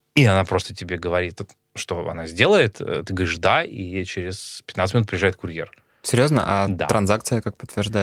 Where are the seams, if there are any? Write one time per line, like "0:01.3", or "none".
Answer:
none